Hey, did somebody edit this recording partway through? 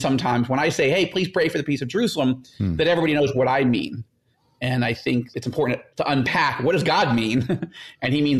no; 0 cuts

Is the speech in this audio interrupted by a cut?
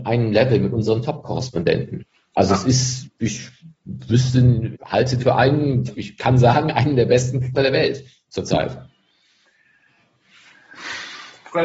yes; 5 cuts; at 3.2 s, 4.7 s, 5.2 s, 5.9 s, 7.5 s

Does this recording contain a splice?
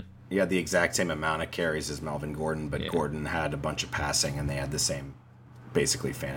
no; 0 cuts

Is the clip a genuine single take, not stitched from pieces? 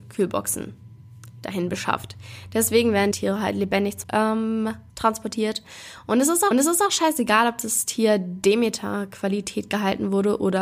no; 4 cuts; at 3.1 s, 4.0 s, 4.9 s, 6.5 s

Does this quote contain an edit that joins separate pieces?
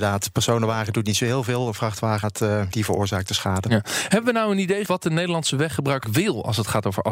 yes; 4 cuts; at 2.2 s, 2.7 s, 4.8 s, 6.0 s

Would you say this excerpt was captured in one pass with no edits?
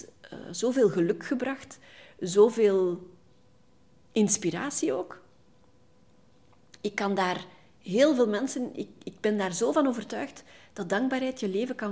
yes; 0 cuts

